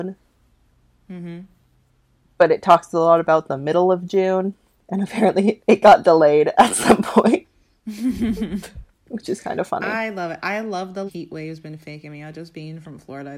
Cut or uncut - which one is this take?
cut